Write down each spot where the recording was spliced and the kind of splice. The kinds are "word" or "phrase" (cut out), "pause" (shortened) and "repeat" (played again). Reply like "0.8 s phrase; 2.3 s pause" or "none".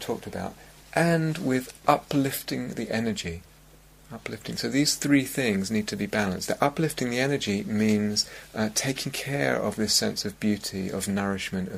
none